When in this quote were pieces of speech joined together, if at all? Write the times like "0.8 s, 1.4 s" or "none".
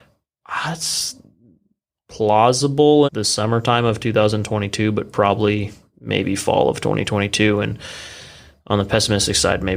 3.0 s

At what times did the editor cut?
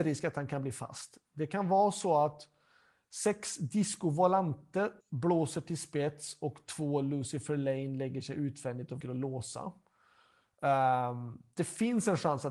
5.0 s, 9.0 s

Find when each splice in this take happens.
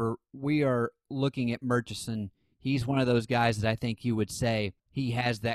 none

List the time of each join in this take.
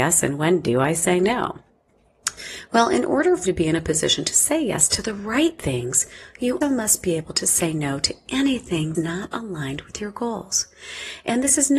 3.5 s, 6.6 s, 8.9 s

